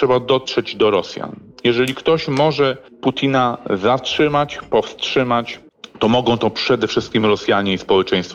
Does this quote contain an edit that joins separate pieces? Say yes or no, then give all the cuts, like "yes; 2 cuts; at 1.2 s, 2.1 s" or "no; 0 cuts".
no; 0 cuts